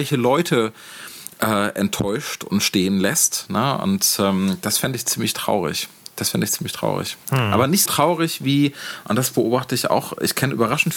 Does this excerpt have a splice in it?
yes; 2 cuts; at 7.2 s, 7.9 s

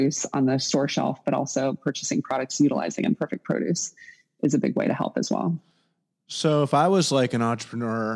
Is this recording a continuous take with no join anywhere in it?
yes; 0 cuts

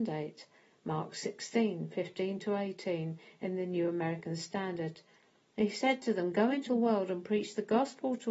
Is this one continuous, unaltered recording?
no; 1 cut; at 6.7 s

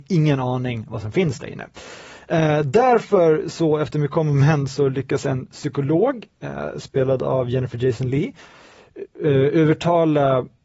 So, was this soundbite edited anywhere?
no; 0 cuts

